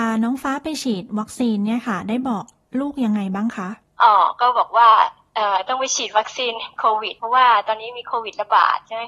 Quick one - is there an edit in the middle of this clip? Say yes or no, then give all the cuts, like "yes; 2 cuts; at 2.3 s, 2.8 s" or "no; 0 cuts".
no; 0 cuts